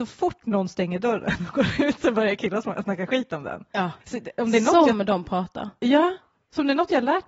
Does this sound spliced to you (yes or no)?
yes